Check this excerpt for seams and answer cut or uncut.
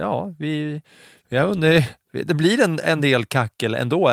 uncut